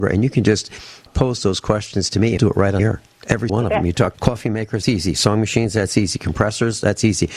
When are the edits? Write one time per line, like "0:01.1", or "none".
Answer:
0:01.1
0:02.4
0:02.8
0:03.5
0:04.1
0:04.8

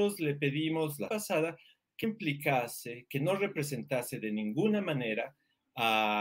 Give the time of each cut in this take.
0:01.1
0:02.0

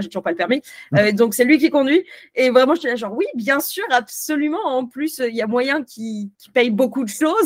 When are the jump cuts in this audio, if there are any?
0:06.3

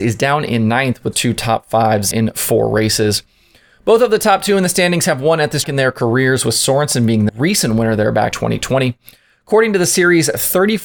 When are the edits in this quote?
0:01.1
0:02.1
0:05.6
0:07.3
0:08.3

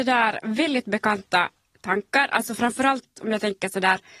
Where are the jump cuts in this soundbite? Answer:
none

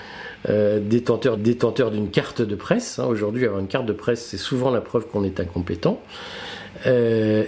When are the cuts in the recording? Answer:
0:01.4

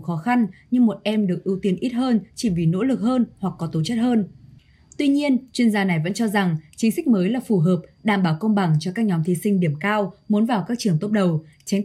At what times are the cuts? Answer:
none

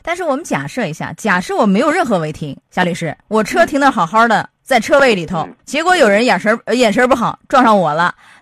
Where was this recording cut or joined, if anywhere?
0:02.6
0:03.2
0:05.6

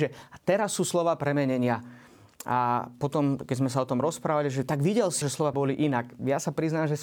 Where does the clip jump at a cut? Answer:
0:05.2
0:05.5

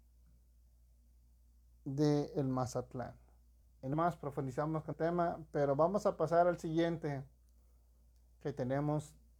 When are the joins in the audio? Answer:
0:03.6
0:03.9
0:04.9

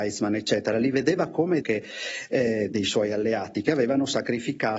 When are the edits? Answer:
0:01.6
0:02.7

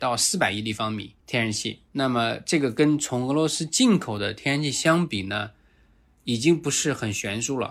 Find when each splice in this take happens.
0:01.2
0:01.9

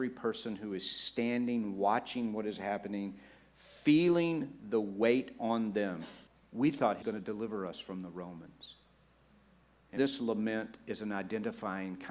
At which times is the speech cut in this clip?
0:06.3
0:07.0
0:10.0

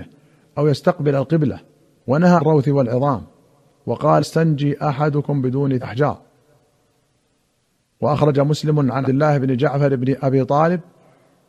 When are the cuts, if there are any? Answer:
0:02.4
0:04.2
0:05.8
0:09.0

